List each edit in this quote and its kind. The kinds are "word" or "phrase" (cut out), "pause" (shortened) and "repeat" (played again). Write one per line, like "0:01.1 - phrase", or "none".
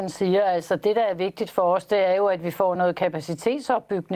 none